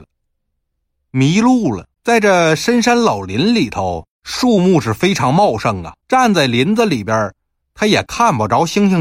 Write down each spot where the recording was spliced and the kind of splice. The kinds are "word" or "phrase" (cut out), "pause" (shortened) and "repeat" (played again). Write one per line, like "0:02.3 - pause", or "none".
0:01.9 - pause
0:04.1 - pause
0:06.0 - pause